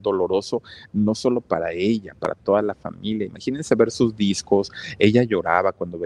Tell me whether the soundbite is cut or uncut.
uncut